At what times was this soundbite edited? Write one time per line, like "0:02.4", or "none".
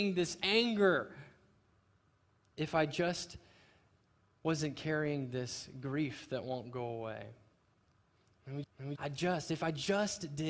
0:08.6
0:09.0

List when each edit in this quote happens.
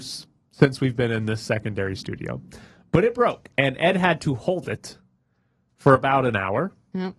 none

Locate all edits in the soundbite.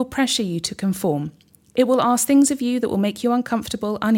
none

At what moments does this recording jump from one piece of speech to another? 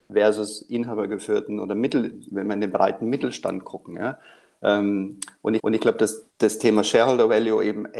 0:05.6
0:06.3

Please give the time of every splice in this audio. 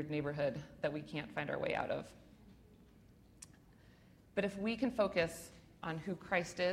none

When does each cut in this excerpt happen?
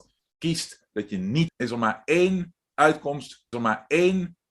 0:01.5
0:03.5

